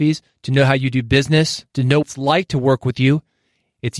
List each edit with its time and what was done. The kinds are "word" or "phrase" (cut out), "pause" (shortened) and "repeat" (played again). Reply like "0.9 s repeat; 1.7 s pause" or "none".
1.7 s pause; 2.0 s word